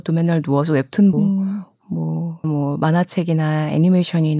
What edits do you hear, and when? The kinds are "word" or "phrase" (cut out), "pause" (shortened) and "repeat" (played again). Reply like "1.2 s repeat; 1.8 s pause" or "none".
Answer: 1.1 s word; 2.4 s word